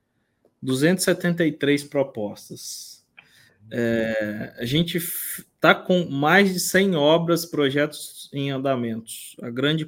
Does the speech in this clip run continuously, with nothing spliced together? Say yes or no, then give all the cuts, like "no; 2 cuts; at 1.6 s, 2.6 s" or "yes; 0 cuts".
yes; 0 cuts